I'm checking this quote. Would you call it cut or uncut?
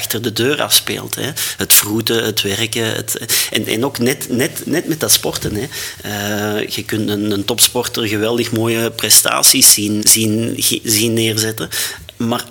cut